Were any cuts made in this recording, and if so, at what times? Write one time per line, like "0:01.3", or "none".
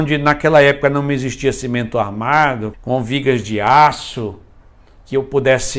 0:02.7